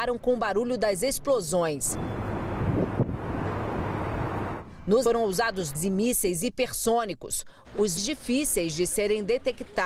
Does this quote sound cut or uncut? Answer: cut